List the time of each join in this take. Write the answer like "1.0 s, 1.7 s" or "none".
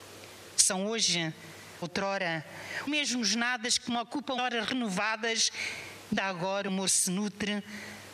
1.8 s, 2.9 s, 4.4 s, 6.2 s, 6.7 s